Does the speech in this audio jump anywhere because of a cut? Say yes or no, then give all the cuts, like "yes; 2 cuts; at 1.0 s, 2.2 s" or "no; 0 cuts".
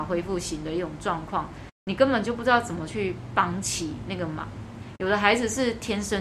yes; 1 cut; at 1.7 s